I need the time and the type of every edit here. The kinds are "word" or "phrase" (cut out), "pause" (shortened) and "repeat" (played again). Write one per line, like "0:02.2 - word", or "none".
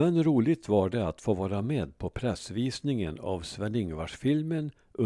none